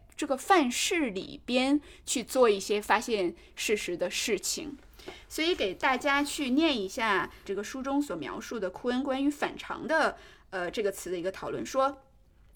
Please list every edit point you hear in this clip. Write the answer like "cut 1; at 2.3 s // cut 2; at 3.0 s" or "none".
none